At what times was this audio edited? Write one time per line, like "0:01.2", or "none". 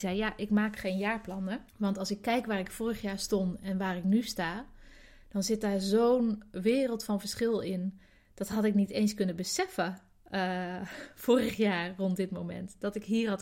0:01.7